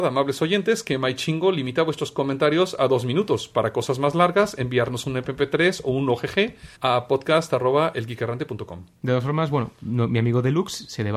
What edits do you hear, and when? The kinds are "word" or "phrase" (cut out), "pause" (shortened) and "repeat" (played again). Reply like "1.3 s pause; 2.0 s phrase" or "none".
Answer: 6.7 s pause